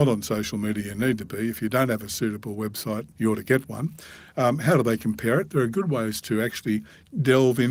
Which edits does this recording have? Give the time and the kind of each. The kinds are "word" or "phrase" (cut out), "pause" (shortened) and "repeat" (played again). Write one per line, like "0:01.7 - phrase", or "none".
0:03.1 - pause